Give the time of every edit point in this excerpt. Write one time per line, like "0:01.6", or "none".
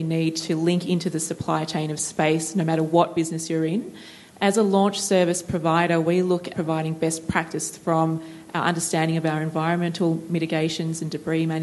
0:06.5